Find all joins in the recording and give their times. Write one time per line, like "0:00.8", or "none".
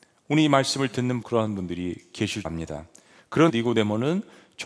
0:01.2
0:02.4
0:03.5